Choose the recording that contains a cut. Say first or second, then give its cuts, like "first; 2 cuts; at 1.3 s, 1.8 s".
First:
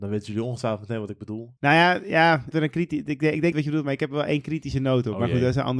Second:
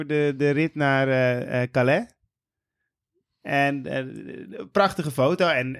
first; 3 cuts; at 1.6 s, 2.5 s, 3.5 s